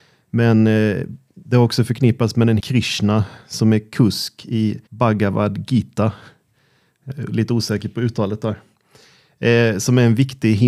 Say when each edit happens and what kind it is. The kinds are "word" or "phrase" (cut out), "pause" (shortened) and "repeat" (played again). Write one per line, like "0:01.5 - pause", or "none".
0:02.6 - phrase
0:04.9 - pause